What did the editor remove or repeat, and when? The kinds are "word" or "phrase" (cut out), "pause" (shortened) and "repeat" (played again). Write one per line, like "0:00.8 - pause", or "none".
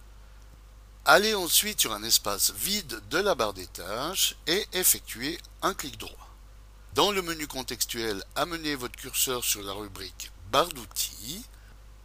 none